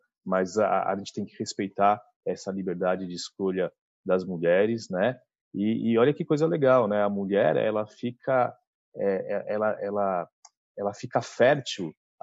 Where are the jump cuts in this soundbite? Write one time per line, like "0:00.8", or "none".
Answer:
0:09.8

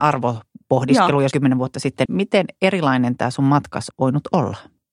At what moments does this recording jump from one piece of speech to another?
0:01.3
0:02.1
0:03.9

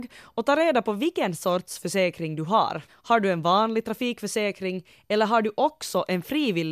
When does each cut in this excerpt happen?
0:02.9

